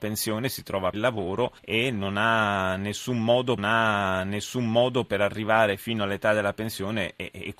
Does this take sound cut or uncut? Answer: cut